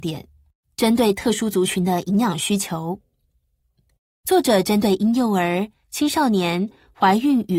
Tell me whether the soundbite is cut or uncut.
uncut